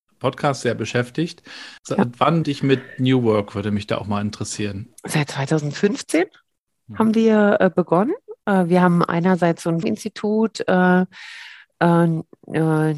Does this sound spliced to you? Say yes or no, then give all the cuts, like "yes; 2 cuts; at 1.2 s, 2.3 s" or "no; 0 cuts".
yes; 3 cuts; at 1.8 s, 2.4 s, 9.8 s